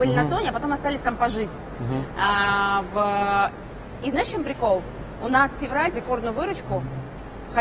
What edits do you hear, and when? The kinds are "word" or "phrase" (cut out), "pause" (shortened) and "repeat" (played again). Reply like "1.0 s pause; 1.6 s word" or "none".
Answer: 5.9 s word